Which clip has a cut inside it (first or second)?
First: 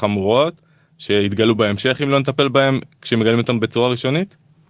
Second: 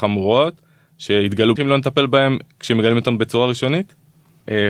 second